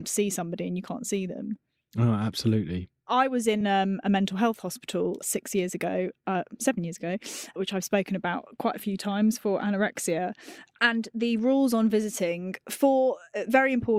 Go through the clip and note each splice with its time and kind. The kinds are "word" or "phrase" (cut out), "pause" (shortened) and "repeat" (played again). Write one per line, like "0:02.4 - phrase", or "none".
none

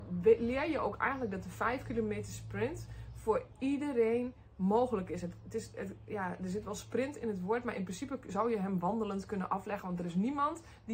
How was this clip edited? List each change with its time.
none

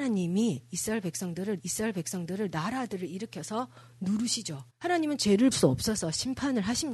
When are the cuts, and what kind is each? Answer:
0:01.6 - repeat
0:04.7 - pause
0:05.5 - word

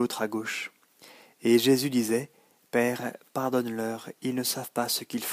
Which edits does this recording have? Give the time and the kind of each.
none

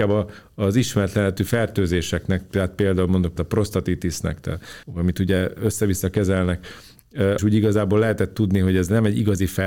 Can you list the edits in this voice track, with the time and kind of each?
0:03.4 - word
0:04.8 - pause
0:07.4 - phrase

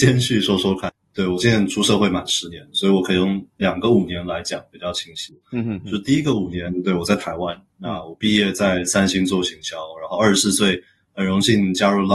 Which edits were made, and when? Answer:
none

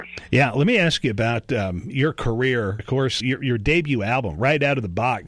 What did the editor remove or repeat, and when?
0:01.9 - word
0:02.8 - word
0:03.2 - word

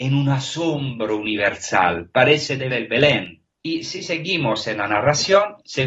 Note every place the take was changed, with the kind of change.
0:02.7 - word
0:03.5 - pause

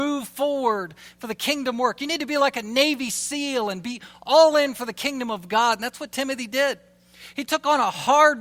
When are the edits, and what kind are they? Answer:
none

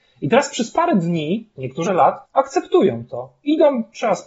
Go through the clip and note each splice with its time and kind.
0:01.5 - word
0:01.9 - phrase
0:02.2 - pause

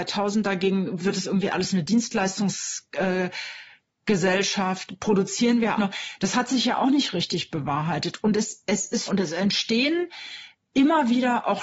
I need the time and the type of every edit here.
0:01.0 - word
0:05.8 - word
0:09.1 - phrase

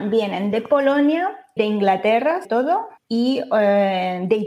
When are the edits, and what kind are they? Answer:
0:01.6 - word
0:02.4 - word
0:03.0 - pause

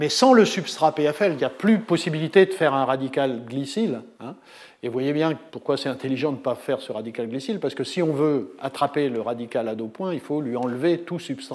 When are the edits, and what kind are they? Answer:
0:01.4 - word
0:04.1 - pause
0:05.5 - pause

